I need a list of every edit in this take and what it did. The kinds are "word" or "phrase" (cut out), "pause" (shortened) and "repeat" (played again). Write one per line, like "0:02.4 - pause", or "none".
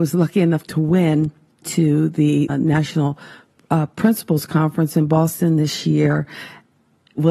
0:01.6 - phrase
0:02.5 - word